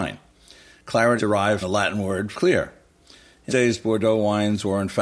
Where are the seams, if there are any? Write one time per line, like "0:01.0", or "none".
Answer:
0:01.2
0:01.6
0:02.3
0:03.5